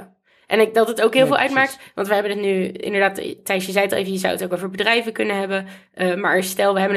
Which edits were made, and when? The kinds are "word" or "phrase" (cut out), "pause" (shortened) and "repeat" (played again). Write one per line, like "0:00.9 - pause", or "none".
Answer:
none